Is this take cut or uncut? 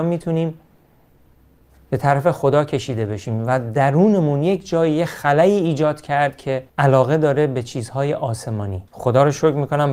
cut